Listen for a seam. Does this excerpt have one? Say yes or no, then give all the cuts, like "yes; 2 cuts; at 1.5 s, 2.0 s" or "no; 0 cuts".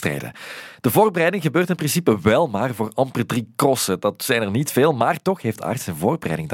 no; 0 cuts